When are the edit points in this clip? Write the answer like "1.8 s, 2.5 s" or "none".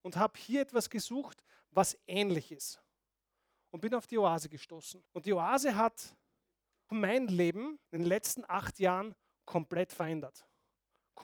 5.1 s, 6.9 s, 7.8 s